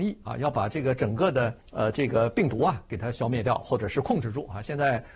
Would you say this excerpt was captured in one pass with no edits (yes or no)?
no